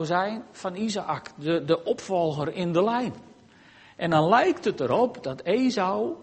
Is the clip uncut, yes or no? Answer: yes